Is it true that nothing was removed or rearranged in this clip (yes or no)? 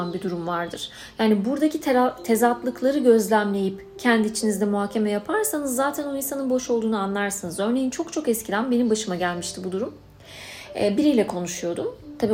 yes